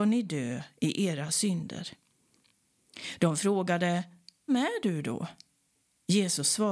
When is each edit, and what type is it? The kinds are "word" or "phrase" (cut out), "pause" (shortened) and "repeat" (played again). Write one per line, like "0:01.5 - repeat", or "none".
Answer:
0:04.5 - word